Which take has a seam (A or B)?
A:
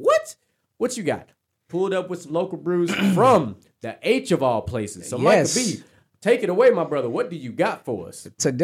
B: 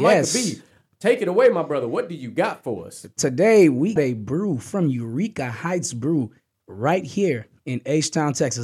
B